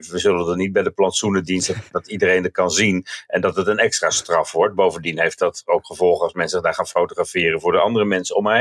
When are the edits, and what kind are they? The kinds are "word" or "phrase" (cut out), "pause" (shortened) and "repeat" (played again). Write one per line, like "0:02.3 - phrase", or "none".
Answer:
0:01.9 - word

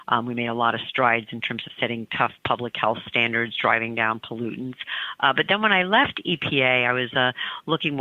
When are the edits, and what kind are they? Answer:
none

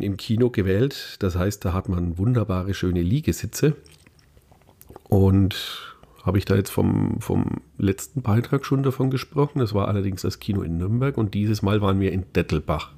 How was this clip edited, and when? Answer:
none

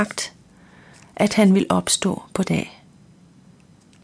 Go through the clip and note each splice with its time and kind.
0:02.4 - word

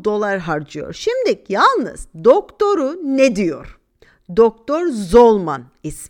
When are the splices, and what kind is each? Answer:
none

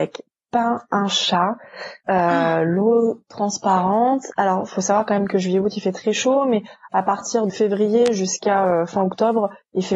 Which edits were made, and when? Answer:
0:02.0 - pause
0:07.5 - word

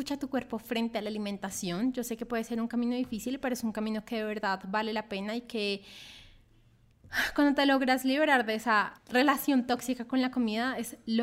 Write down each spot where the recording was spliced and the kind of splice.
0:09.0 - pause

